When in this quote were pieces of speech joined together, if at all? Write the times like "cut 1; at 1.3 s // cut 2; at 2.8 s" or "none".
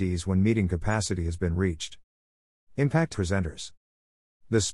cut 1; at 3.1 s